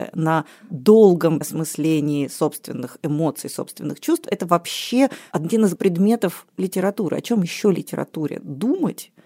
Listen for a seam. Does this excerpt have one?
yes; 2 cuts; at 1.4 s, 5.7 s

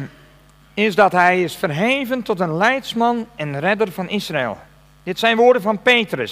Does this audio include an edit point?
no; 0 cuts

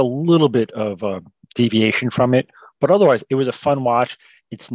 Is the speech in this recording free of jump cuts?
yes; 0 cuts

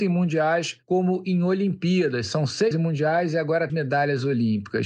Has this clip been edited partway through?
yes; 2 cuts; at 2.7 s, 3.7 s

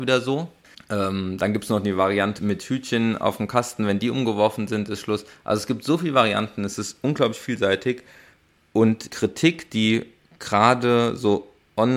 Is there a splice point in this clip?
yes; 2 cuts; at 2.4 s, 9.1 s

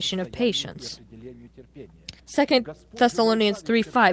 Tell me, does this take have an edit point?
yes; 1 cut; at 2.2 s

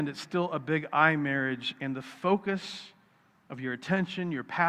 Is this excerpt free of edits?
yes; 0 cuts

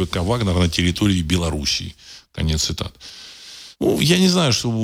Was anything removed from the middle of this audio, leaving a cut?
yes; 1 cut; at 3.7 s

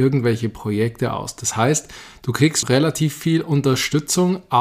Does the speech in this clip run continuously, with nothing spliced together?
no; 1 cut; at 2.6 s

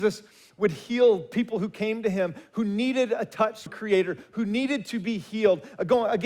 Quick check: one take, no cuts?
no; 1 cut; at 3.7 s

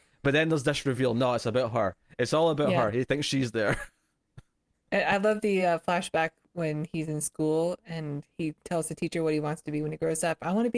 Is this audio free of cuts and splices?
yes; 0 cuts

